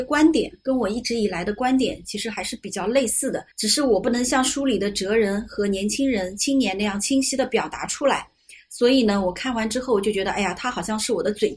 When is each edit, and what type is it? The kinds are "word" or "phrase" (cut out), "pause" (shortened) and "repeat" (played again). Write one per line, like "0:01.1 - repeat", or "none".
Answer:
0:03.5 - pause